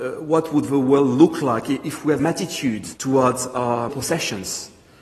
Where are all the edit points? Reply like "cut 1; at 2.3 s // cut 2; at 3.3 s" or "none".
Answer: cut 1; at 2.2 s // cut 2; at 3.0 s // cut 3; at 3.9 s